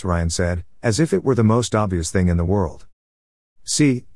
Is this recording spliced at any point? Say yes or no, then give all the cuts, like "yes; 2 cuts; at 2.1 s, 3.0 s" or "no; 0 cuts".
no; 0 cuts